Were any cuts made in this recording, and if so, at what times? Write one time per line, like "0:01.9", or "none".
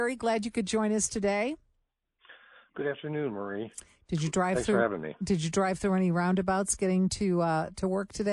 none